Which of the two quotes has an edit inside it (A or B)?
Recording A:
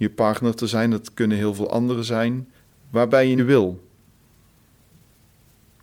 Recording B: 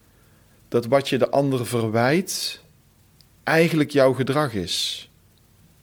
A